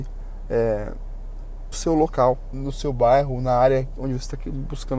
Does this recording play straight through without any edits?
no; 2 cuts; at 1.7 s, 2.5 s

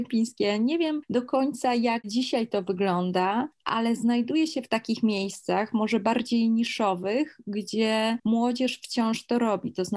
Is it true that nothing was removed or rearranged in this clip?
yes; 0 cuts

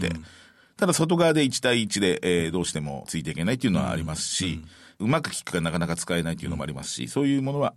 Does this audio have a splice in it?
no; 0 cuts

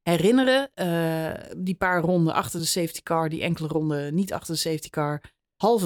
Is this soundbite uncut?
yes; 0 cuts

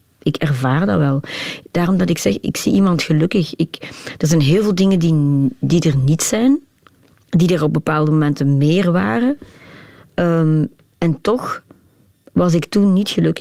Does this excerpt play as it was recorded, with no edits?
yes; 0 cuts

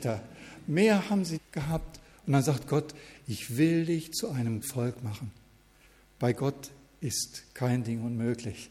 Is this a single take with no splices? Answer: no; 2 cuts; at 1.4 s, 4.6 s

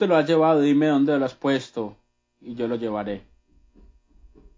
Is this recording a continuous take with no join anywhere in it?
yes; 0 cuts

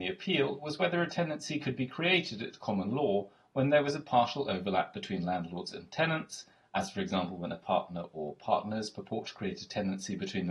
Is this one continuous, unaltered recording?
yes; 0 cuts

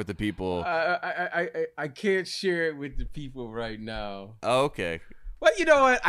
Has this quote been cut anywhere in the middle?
no; 0 cuts

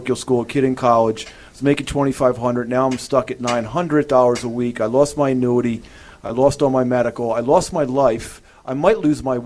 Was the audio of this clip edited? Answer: no; 0 cuts

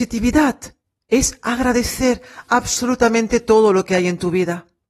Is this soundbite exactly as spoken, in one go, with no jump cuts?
yes; 0 cuts

